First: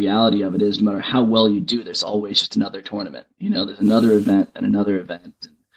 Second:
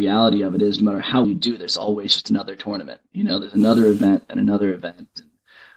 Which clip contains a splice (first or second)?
second